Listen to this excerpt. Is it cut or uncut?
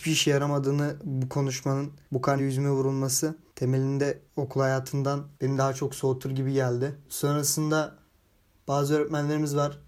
cut